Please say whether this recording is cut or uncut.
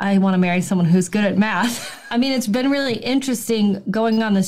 cut